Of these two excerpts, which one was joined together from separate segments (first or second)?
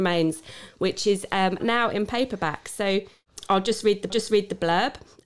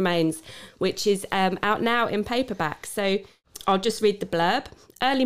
first